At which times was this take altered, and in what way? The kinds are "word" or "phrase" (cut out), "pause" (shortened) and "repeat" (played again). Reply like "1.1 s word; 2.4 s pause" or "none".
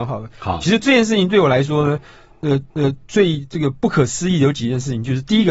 2.7 s repeat